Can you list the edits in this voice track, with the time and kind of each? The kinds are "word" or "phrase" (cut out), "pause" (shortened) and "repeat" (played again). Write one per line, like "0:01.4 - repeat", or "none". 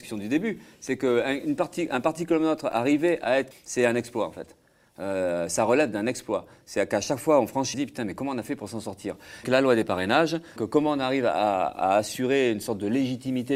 0:03.5 - phrase
0:07.7 - phrase
0:09.4 - word
0:10.6 - word